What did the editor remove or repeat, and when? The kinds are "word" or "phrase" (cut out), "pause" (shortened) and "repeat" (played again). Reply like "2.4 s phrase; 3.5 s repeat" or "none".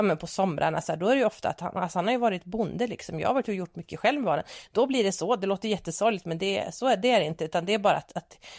none